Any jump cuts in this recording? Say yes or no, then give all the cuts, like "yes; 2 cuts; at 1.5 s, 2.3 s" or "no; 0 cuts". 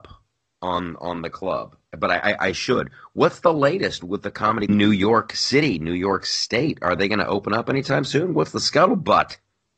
yes; 3 cuts; at 1.9 s, 4.0 s, 4.7 s